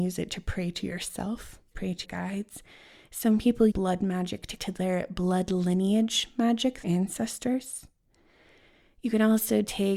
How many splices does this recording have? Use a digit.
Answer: 5